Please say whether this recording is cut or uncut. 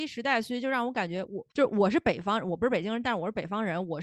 cut